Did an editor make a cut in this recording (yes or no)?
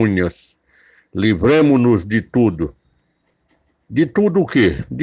yes